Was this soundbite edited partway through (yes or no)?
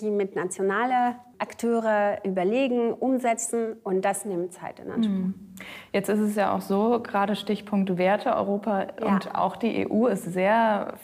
no